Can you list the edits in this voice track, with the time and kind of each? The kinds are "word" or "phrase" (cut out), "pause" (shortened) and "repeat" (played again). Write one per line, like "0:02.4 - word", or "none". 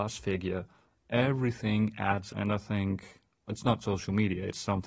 0:02.3 - word
0:03.5 - word
0:03.8 - word